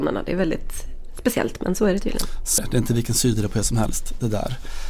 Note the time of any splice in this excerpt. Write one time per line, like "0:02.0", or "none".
0:02.6

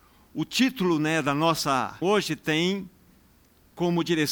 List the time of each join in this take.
0:02.0

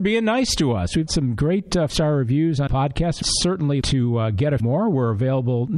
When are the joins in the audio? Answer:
0:01.1
0:01.9
0:02.7
0:03.2
0:03.8
0:04.6

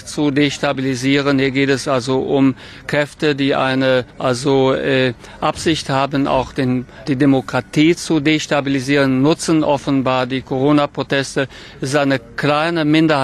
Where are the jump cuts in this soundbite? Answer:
0:04.1
0:07.1

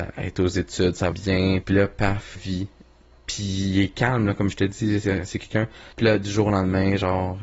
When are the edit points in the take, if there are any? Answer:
0:01.1
0:01.6
0:02.4
0:05.9

